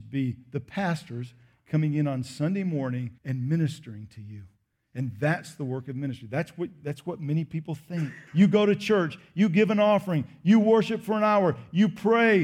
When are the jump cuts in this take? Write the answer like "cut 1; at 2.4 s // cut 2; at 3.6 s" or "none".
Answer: cut 1; at 3.2 s // cut 2; at 8.3 s